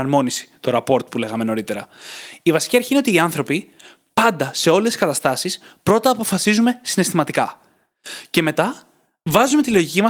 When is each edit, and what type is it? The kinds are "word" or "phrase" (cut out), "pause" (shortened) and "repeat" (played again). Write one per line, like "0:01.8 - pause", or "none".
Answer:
none

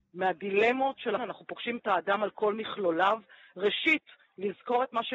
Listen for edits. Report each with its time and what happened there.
0:01.2 - word

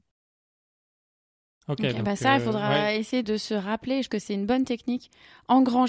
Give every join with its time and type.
0:03.2 - word
0:04.1 - word

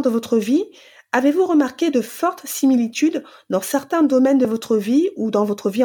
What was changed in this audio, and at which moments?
none

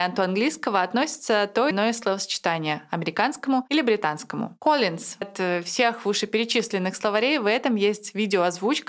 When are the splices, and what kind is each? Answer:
0:01.7 - word
0:05.2 - word

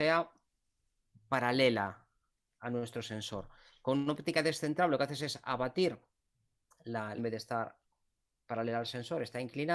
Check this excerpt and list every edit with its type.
0:07.2 - phrase

